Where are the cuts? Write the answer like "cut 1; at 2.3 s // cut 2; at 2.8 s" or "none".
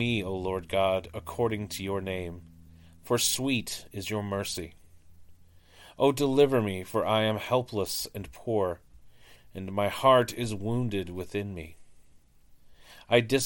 none